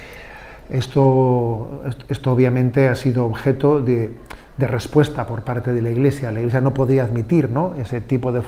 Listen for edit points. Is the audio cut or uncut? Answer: uncut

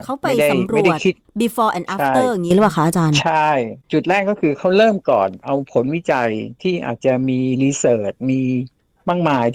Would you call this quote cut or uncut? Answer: cut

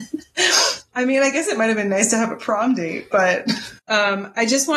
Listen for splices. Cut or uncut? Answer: cut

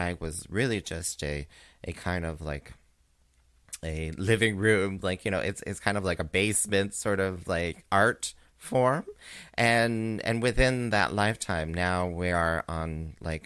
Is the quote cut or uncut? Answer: uncut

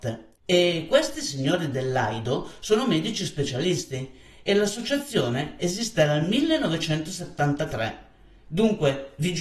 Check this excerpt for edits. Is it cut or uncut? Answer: uncut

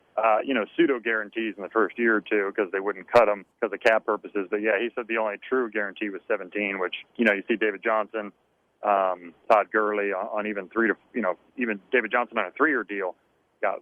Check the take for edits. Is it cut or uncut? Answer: cut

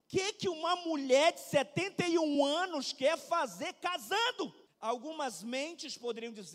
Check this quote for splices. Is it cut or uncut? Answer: uncut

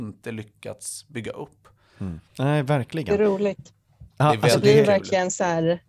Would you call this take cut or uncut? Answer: cut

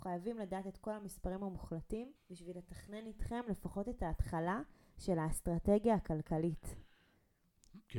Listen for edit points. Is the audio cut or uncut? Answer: cut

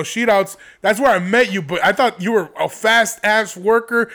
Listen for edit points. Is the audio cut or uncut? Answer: uncut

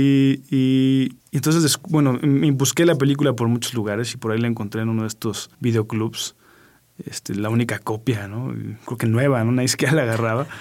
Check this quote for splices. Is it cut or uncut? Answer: cut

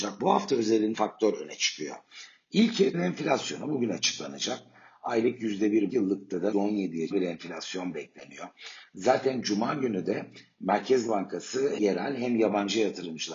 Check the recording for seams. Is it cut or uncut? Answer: cut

